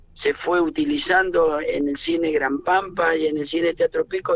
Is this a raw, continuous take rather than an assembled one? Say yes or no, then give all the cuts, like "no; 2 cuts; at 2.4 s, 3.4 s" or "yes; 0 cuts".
yes; 0 cuts